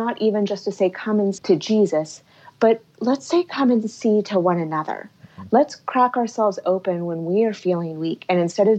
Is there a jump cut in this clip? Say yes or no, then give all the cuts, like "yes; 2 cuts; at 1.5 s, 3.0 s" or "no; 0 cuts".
yes; 1 cut; at 1.4 s